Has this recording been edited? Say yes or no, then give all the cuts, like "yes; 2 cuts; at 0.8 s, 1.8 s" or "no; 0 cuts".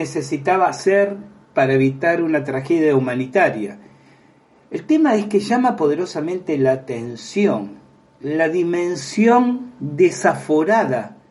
no; 0 cuts